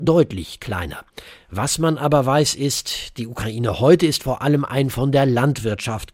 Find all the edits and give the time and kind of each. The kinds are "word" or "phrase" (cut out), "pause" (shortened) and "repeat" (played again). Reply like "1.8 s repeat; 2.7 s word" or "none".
none

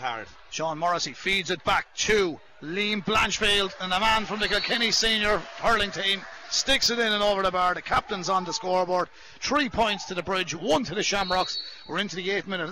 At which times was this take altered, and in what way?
none

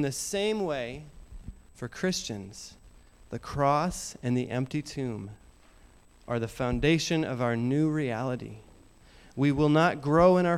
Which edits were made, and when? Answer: none

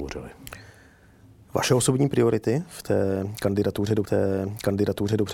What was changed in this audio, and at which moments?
4.0 s repeat

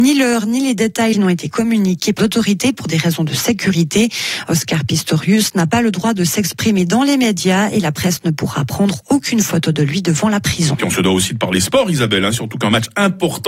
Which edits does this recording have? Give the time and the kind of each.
1.1 s phrase; 2.2 s word

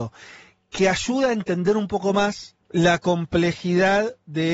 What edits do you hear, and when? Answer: 2.6 s pause

